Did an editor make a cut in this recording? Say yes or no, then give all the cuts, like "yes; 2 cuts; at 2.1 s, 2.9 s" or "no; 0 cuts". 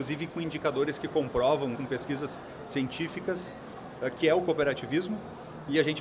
yes; 1 cut; at 1.7 s